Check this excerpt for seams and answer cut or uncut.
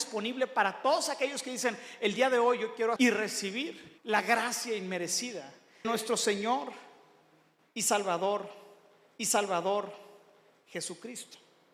cut